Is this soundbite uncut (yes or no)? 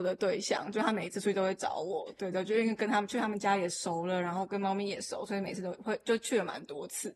yes